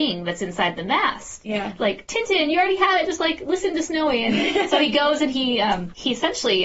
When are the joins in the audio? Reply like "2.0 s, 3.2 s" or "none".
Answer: none